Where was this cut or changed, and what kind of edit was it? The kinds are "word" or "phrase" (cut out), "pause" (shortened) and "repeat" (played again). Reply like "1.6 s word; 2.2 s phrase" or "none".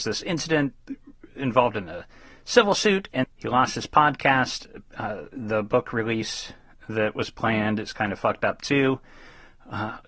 3.2 s word